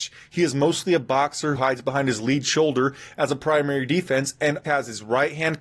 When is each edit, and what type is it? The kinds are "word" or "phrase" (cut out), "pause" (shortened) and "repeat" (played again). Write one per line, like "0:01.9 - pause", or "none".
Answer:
0:01.5 - word
0:04.6 - word